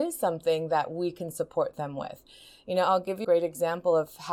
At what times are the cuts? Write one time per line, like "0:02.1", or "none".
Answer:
0:03.2

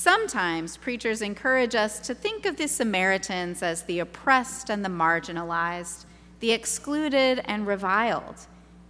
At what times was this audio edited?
none

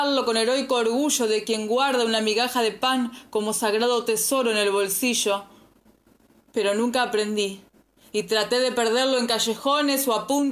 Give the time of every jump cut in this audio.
none

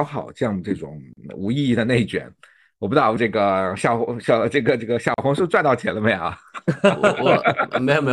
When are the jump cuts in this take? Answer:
0:03.2

